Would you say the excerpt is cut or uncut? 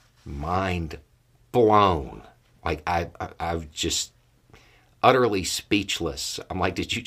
uncut